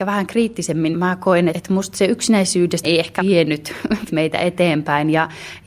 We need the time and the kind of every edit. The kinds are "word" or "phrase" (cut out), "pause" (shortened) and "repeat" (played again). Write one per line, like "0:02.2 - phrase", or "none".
0:00.9 - word
0:01.5 - word
0:02.8 - word
0:03.2 - word
0:04.1 - word